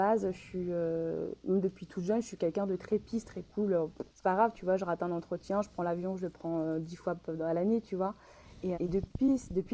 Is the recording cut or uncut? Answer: cut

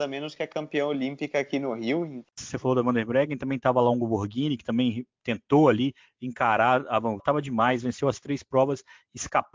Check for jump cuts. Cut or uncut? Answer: cut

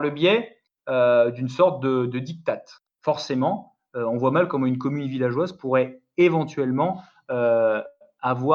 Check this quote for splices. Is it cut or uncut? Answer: cut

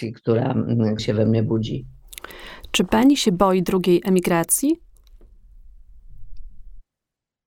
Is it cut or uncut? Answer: cut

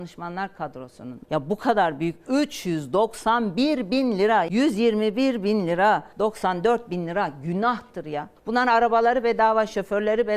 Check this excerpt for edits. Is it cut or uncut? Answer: uncut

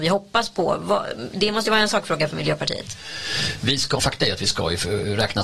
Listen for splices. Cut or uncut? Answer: cut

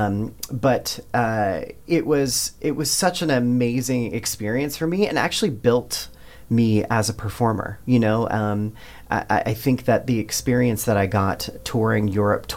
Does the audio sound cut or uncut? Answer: uncut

